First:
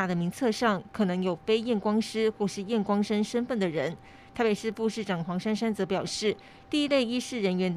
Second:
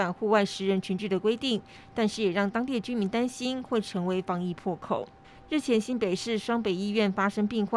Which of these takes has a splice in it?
second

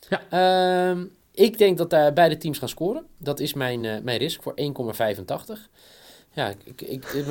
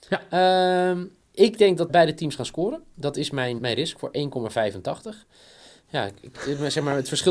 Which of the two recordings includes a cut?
second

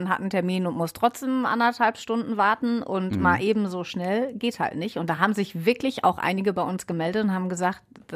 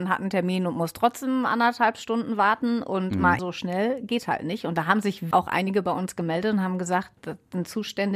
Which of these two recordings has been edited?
second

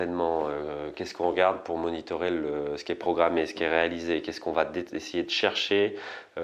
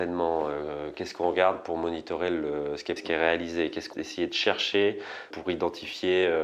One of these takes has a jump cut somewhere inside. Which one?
second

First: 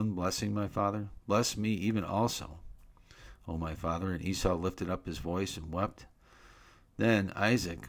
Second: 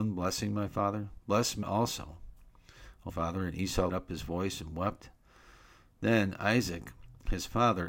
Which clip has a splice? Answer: second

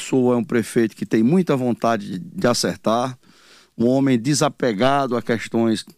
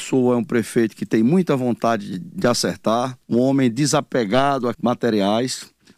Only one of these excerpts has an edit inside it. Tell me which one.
second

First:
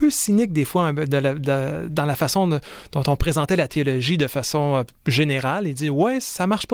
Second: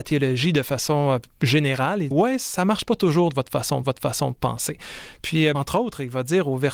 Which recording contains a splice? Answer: second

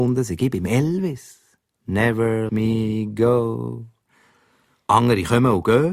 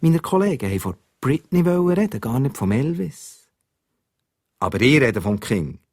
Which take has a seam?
first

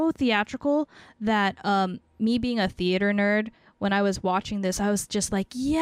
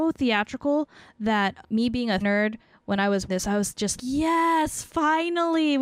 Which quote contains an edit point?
second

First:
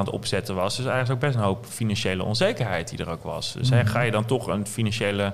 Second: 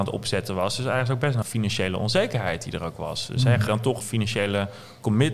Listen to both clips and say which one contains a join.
second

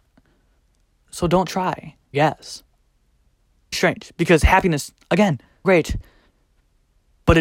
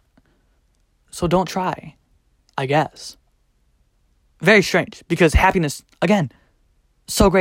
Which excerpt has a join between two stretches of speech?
first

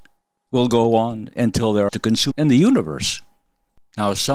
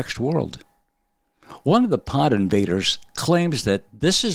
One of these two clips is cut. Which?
first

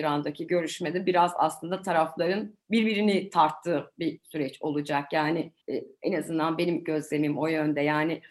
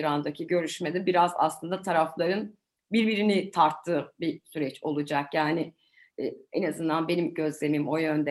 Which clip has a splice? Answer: first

